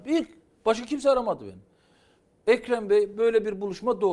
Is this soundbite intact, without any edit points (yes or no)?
yes